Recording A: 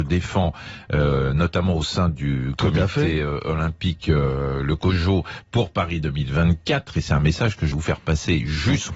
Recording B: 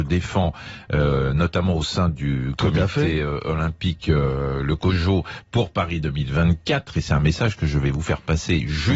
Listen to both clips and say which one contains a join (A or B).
A